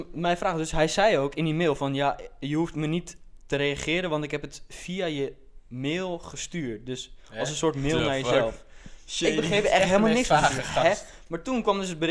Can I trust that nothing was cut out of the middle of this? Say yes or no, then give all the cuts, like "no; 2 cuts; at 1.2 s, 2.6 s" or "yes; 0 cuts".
yes; 0 cuts